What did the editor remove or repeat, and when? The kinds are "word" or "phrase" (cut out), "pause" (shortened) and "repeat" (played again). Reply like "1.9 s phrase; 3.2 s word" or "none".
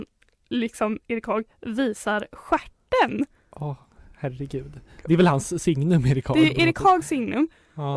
none